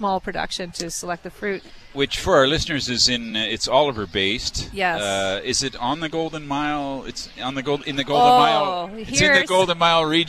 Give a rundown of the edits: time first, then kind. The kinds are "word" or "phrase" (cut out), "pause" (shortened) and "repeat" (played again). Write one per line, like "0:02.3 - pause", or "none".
none